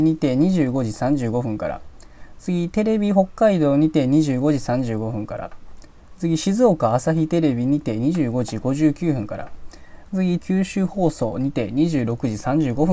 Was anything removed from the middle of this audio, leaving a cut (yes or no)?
yes